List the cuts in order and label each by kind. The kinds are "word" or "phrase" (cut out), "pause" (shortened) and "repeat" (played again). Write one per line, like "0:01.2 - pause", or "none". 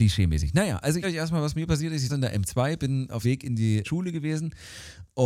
0:01.0 - word
0:02.1 - word
0:03.2 - word
0:03.8 - word